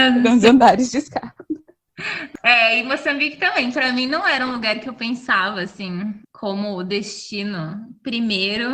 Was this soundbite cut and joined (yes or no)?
yes